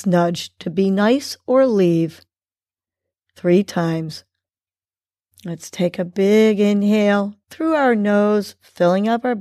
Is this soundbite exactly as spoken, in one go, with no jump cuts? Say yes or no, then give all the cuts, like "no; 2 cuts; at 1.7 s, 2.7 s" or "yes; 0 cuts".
yes; 0 cuts